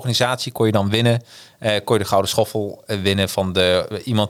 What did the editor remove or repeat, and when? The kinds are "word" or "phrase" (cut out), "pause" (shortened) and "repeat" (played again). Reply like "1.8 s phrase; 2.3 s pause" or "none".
none